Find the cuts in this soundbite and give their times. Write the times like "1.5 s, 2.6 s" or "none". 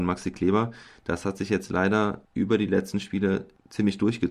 none